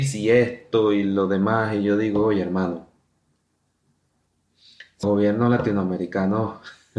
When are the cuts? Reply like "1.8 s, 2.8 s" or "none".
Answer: 5.0 s